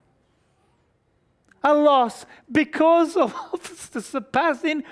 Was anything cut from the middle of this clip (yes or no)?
no